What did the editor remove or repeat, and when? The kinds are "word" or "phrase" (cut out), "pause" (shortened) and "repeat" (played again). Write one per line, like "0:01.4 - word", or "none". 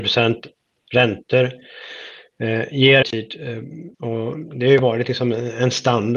0:03.0 - phrase
0:03.9 - pause